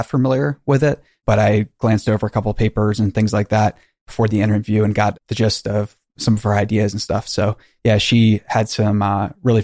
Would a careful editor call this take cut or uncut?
uncut